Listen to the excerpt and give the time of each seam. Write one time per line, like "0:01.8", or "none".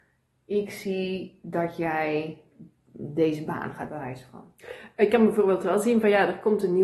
0:03.9